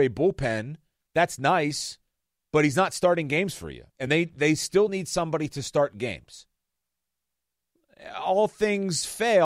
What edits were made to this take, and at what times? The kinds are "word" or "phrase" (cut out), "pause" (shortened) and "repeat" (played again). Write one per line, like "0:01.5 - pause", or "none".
none